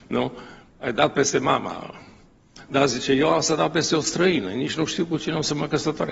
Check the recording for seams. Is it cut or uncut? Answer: uncut